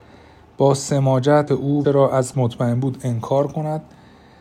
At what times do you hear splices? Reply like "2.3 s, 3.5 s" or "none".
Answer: 1.5 s, 1.8 s, 2.3 s